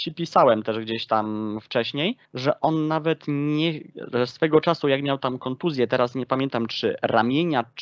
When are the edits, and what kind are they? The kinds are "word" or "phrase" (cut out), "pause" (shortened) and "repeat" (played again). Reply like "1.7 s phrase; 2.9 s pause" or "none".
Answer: 2.2 s pause